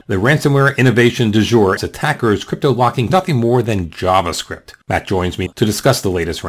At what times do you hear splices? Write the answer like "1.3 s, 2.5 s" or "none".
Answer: 1.8 s, 3.1 s, 4.8 s, 5.5 s